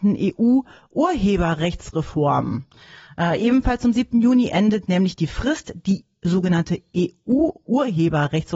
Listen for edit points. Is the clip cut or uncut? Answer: uncut